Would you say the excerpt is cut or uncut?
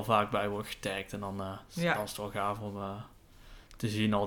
uncut